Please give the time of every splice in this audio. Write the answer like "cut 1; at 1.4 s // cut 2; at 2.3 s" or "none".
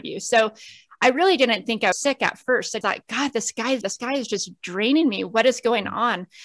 cut 1; at 1.9 s // cut 2; at 2.8 s // cut 3; at 3.8 s